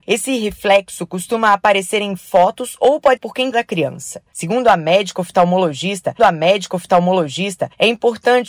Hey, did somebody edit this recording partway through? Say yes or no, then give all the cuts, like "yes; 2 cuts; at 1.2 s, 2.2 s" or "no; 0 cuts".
yes; 3 cuts; at 3.2 s, 3.5 s, 6.2 s